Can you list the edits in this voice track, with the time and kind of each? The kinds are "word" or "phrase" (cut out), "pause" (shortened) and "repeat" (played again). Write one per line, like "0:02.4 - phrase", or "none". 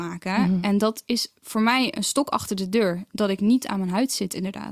none